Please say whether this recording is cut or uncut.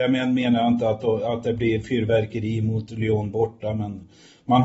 uncut